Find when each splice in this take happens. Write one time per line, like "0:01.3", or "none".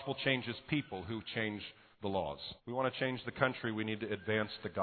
0:01.9
0:02.6